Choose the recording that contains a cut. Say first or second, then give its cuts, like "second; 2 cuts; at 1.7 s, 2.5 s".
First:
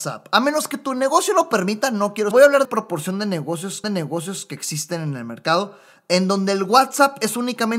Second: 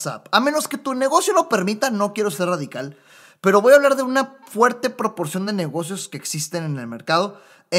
first; 3 cuts; at 2.3 s, 2.6 s, 3.8 s